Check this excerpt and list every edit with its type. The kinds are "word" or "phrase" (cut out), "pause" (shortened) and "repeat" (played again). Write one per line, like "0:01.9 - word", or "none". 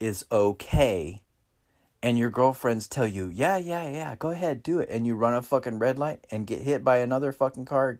none